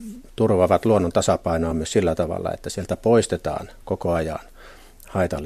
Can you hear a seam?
no; 0 cuts

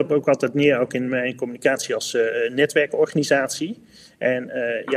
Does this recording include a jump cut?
no; 0 cuts

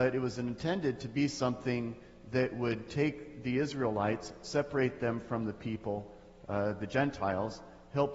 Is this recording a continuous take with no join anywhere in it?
yes; 0 cuts

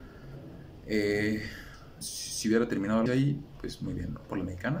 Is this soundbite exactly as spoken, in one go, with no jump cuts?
no; 2 cuts; at 2.0 s, 3.1 s

